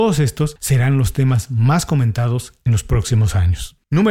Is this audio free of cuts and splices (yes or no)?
yes